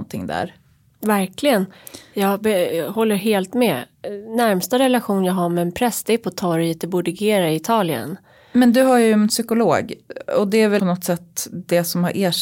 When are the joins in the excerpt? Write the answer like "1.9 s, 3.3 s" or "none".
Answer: 10.8 s